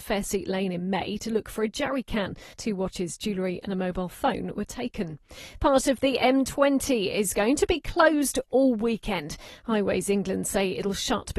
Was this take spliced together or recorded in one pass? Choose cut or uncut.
cut